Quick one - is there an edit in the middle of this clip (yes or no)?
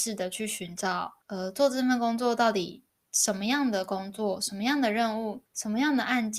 yes